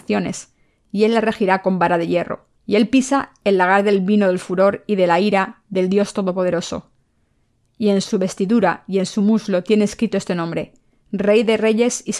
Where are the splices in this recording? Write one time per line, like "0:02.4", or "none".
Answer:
0:02.6